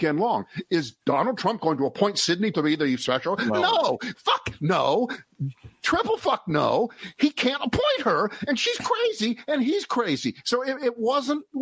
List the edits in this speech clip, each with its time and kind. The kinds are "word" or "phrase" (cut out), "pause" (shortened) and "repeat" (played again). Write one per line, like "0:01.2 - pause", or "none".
0:02.5 - word